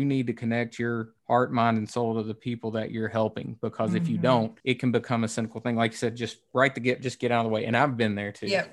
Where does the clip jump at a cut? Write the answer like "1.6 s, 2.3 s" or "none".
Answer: 1.2 s, 4.6 s